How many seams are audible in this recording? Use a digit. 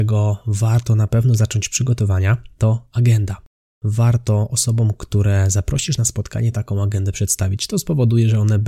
0